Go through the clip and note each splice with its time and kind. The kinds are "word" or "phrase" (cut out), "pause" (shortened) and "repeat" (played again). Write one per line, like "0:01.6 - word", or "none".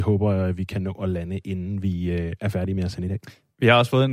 none